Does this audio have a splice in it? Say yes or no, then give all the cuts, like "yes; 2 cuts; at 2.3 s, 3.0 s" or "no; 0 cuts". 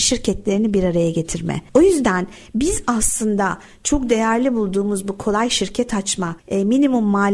no; 0 cuts